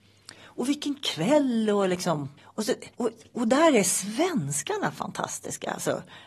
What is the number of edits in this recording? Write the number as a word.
two